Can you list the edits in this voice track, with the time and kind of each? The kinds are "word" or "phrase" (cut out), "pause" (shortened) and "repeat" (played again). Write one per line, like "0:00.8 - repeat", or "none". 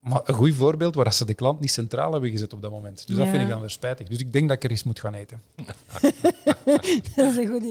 none